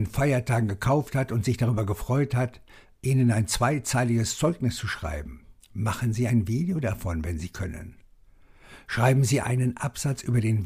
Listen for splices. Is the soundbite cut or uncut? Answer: uncut